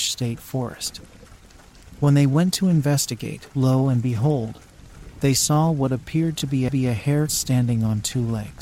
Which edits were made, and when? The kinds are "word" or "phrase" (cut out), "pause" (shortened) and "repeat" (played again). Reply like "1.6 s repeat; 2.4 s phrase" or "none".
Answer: 3.5 s pause; 6.7 s repeat; 7.3 s phrase